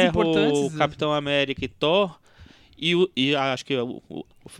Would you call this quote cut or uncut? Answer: uncut